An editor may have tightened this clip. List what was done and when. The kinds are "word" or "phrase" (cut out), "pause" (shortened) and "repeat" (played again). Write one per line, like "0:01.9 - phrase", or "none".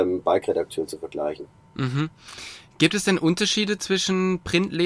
none

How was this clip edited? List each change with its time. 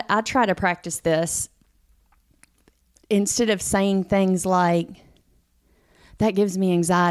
none

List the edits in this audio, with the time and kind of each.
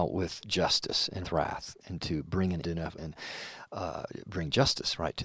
0:01.2 - word
0:02.6 - word
0:03.0 - word

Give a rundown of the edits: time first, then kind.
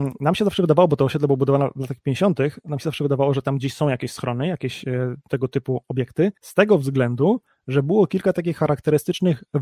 0:06.4 - pause

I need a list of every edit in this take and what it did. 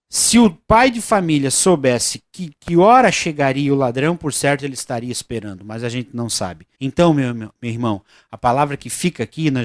0:06.7 - pause

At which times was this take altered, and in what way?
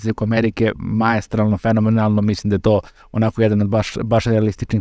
none

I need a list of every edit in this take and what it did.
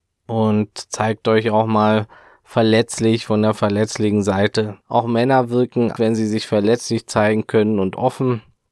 0:04.8 - pause
0:06.0 - word

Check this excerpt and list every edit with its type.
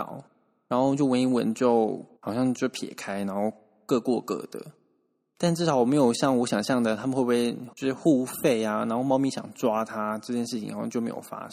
0:02.2 - pause
0:07.7 - pause

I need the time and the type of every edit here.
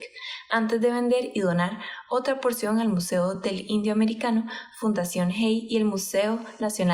none

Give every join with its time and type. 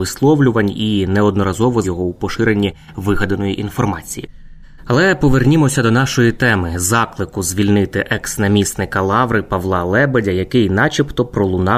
0:01.8 - word
0:04.6 - pause

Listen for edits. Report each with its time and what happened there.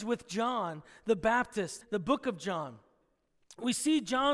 0:01.8 - word

